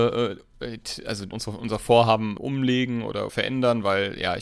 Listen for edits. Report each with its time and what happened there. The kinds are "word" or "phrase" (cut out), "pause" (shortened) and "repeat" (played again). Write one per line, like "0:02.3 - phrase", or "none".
0:01.3 - word
0:02.4 - word
0:03.3 - word

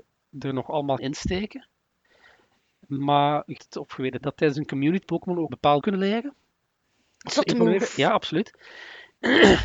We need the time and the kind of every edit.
0:01.0 - word
0:03.6 - word
0:04.2 - word
0:05.0 - word
0:05.5 - word
0:05.8 - word

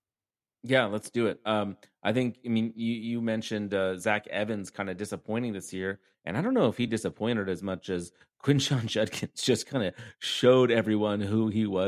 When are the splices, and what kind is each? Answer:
none

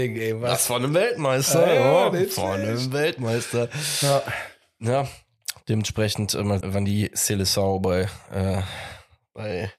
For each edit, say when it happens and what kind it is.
0:06.6 - word

